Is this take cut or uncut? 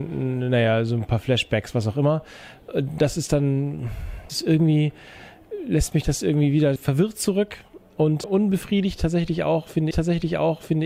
cut